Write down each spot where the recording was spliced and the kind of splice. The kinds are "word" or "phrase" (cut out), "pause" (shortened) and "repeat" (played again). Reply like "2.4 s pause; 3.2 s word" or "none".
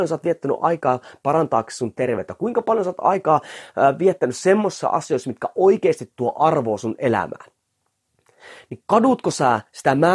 none